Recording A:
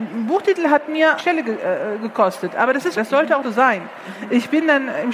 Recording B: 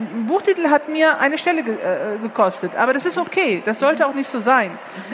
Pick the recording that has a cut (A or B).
A